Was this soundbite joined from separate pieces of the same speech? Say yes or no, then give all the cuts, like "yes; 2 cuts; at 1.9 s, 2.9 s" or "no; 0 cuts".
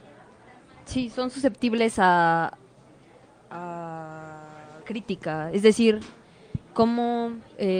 yes; 1 cut; at 4.8 s